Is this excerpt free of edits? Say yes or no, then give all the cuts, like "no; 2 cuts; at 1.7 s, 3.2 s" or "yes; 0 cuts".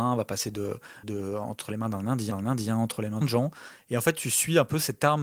no; 3 cuts; at 1.0 s, 2.3 s, 3.2 s